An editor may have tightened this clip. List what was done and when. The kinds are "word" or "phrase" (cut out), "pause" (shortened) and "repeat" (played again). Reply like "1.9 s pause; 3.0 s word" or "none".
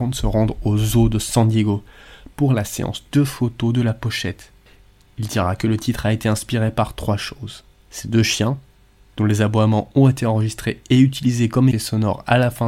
11.7 s word